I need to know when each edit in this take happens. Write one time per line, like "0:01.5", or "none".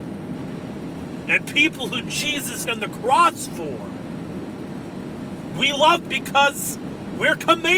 0:02.7
0:06.0